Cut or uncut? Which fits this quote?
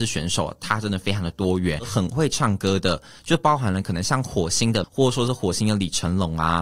cut